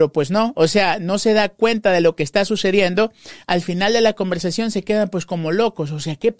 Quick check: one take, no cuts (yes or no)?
yes